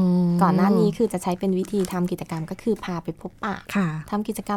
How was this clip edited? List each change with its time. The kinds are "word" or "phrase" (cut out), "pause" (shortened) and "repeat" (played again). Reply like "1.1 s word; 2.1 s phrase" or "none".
3.7 s pause